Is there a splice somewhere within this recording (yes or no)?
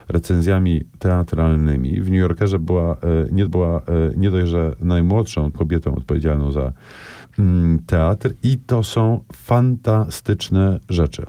yes